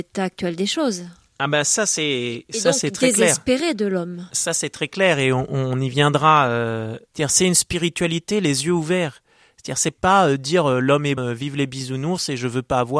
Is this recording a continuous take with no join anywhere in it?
no; 1 cut; at 11.2 s

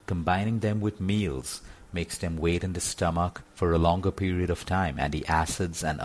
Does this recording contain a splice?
yes; 1 cut; at 3.5 s

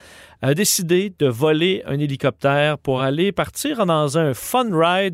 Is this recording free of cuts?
yes; 0 cuts

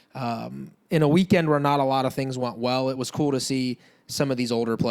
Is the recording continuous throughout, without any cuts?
yes; 0 cuts

